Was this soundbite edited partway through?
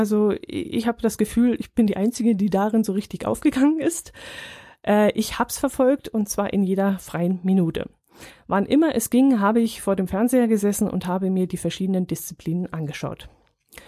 no; 0 cuts

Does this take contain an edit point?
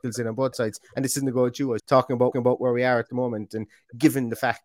yes; 2 cuts; at 1.8 s, 2.3 s

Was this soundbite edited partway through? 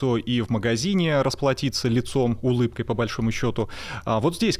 no; 0 cuts

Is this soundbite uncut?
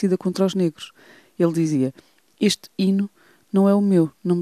yes; 0 cuts

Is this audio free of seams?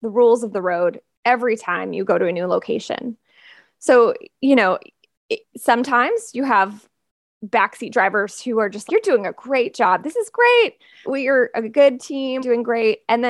no; 3 cuts; at 8.9 s, 11.0 s, 12.4 s

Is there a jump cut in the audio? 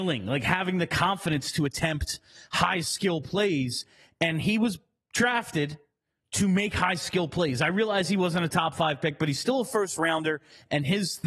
no; 0 cuts

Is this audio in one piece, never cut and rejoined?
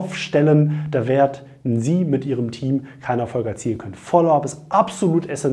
yes; 0 cuts

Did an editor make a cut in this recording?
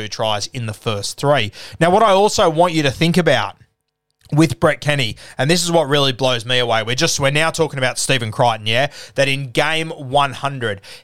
no; 0 cuts

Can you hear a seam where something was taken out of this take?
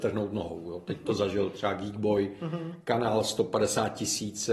no; 0 cuts

